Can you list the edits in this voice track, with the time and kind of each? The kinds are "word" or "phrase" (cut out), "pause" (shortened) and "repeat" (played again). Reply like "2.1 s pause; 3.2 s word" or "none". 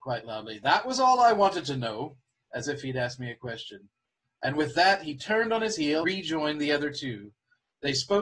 6.0 s word